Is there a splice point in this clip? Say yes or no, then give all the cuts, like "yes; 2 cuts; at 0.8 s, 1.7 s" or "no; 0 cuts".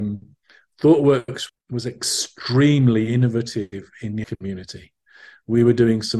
yes; 2 cuts; at 1.5 s, 4.2 s